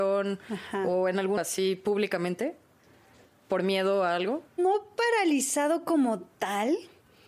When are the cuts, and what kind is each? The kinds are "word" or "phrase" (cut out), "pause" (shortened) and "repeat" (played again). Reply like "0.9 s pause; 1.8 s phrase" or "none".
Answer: 1.4 s word; 4.5 s pause